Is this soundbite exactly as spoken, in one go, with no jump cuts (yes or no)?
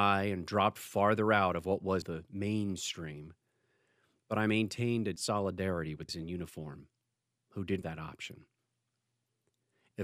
no